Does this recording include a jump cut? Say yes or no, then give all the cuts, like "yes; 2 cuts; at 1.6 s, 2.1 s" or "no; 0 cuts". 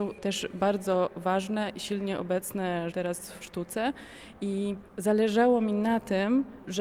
yes; 2 cuts; at 2.9 s, 3.4 s